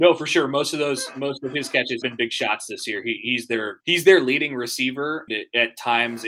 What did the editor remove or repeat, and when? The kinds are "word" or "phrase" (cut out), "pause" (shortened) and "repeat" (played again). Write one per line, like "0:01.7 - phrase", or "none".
0:02.0 - word
0:03.8 - pause
0:05.3 - word